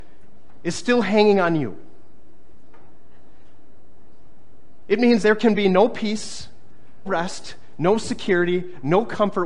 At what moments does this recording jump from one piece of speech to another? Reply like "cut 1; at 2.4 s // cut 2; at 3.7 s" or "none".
cut 1; at 5.2 s // cut 2; at 7.1 s